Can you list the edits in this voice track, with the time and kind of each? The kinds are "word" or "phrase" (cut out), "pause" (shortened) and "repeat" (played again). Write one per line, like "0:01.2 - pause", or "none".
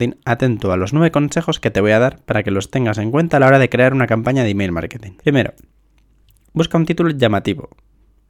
0:05.2 - pause